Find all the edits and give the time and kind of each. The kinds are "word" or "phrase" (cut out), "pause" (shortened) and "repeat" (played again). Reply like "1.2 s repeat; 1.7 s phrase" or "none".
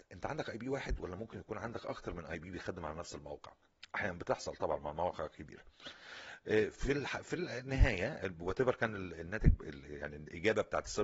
none